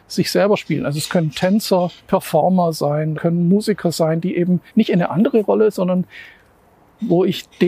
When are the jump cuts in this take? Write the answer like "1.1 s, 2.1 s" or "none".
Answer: 2.0 s, 3.1 s, 4.7 s